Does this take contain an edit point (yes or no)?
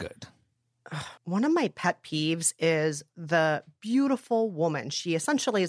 yes